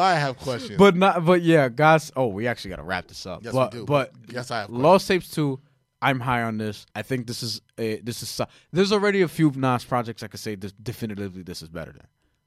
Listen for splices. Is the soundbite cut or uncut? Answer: cut